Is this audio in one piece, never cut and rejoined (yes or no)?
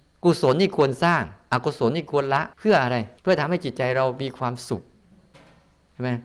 no